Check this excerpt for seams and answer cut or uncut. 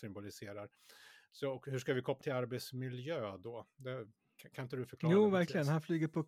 cut